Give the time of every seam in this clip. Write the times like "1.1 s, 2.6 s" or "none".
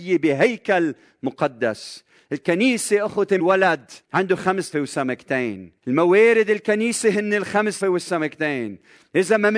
3.4 s, 4.0 s, 4.7 s, 5.8 s, 7.8 s